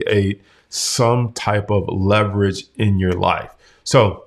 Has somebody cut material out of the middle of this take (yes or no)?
no